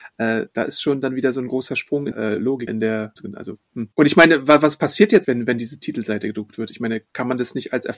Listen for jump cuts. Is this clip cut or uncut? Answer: cut